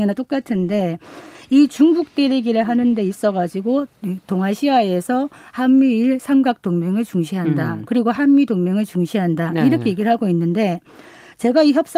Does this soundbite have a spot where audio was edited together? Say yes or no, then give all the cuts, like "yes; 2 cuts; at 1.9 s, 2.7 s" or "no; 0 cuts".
no; 0 cuts